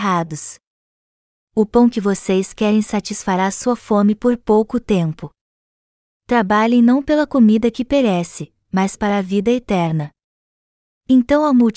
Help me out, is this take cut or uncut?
cut